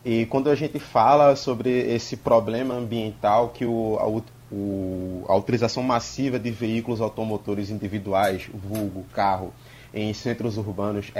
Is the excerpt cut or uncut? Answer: uncut